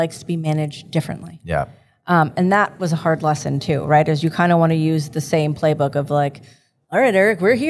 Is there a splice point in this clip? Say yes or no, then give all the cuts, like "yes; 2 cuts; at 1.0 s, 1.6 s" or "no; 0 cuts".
no; 0 cuts